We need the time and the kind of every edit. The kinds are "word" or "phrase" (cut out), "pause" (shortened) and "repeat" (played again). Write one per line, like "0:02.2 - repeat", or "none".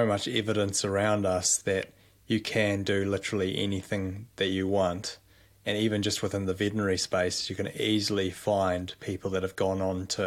none